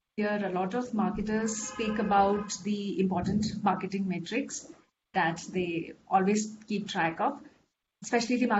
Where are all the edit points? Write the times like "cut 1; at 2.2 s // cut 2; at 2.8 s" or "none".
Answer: none

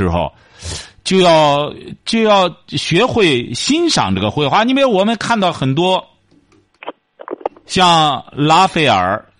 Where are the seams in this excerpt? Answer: none

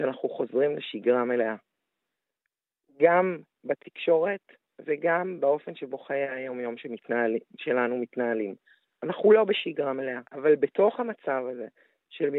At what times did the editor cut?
cut 1; at 10.3 s

